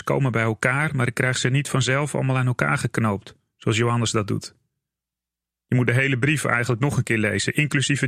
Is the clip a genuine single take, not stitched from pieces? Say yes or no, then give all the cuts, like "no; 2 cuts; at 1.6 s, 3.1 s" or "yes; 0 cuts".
yes; 0 cuts